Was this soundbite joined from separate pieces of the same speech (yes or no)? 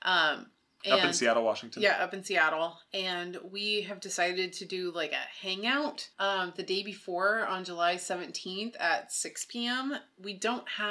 yes